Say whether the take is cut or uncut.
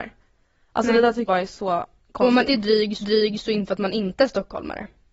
cut